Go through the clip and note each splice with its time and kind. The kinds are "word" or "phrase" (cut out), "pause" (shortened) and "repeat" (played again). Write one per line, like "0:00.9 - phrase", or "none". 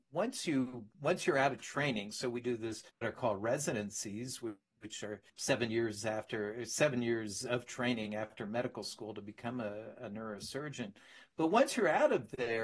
0:02.9 - pause
0:05.3 - pause